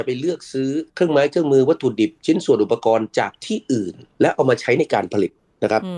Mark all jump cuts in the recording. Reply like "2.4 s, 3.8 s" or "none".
none